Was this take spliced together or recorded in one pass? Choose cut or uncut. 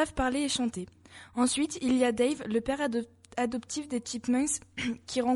uncut